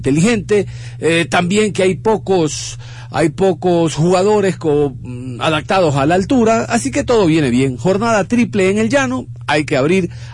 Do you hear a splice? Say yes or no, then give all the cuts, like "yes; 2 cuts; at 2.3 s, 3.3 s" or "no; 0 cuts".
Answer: no; 0 cuts